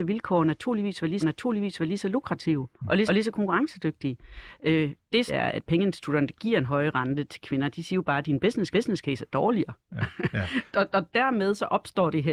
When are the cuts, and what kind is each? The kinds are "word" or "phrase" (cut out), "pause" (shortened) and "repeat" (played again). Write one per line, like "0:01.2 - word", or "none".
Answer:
0:01.2 - repeat
0:02.8 - pause
0:03.1 - repeat
0:05.3 - phrase
0:08.7 - repeat
0:10.7 - word